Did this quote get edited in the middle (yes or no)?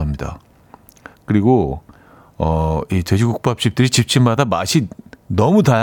no